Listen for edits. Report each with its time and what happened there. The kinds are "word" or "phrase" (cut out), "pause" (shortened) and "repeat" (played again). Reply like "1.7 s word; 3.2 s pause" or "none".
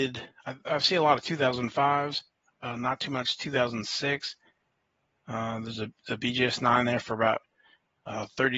none